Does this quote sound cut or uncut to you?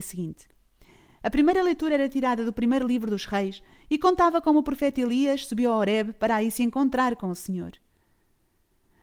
uncut